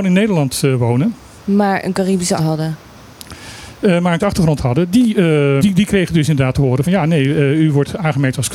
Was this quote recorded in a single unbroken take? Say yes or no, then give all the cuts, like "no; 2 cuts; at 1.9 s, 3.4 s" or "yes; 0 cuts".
no; 4 cuts; at 2.4 s, 4.2 s, 5.6 s, 6.8 s